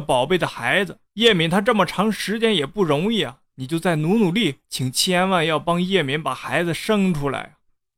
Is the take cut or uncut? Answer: cut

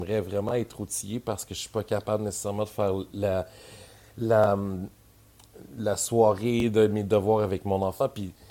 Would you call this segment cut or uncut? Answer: uncut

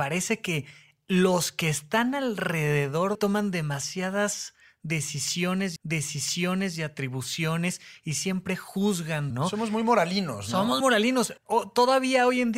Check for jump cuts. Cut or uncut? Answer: cut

